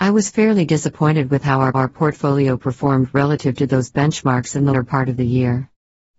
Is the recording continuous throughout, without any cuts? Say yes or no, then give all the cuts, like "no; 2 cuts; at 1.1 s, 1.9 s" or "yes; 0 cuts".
no; 2 cuts; at 1.7 s, 4.7 s